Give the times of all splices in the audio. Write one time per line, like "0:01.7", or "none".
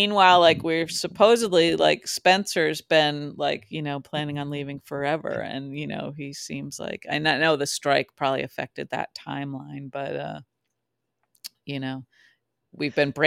none